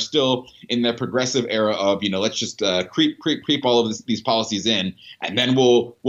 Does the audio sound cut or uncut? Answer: uncut